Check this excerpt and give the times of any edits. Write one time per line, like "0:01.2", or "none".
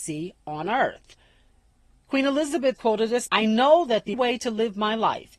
0:02.8
0:03.3
0:04.1